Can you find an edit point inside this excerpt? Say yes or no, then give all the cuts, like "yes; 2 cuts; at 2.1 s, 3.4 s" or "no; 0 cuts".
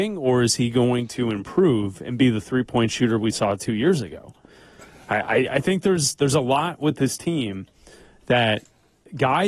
no; 0 cuts